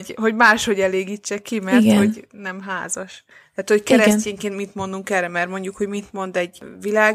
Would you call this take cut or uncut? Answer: uncut